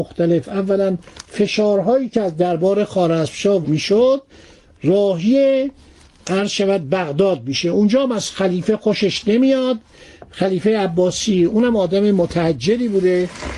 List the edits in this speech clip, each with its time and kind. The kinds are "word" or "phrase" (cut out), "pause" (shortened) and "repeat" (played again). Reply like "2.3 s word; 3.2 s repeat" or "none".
3.6 s word